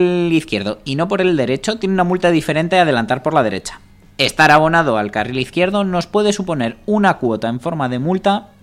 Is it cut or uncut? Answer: uncut